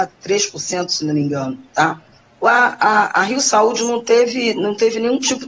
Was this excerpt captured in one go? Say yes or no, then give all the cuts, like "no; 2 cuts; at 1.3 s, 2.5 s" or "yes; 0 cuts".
yes; 0 cuts